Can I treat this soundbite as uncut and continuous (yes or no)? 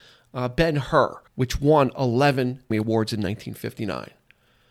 no